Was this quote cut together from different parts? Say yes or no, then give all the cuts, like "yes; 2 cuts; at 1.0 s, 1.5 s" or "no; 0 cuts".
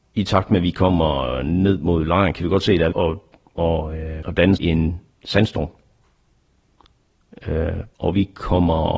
yes; 4 cuts; at 2.9 s, 4.2 s, 4.6 s, 7.9 s